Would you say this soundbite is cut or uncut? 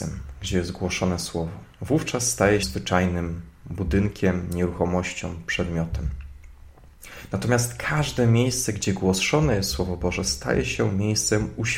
cut